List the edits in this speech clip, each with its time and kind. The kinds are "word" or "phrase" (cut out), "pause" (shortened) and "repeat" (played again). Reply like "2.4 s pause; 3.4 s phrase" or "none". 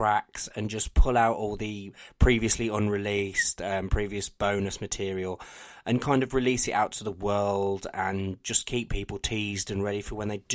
none